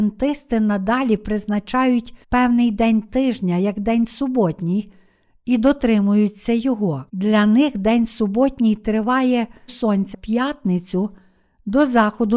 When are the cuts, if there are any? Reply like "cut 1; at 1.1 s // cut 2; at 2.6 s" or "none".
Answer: cut 1; at 2.2 s // cut 2; at 7.1 s // cut 3; at 9.7 s // cut 4; at 10.1 s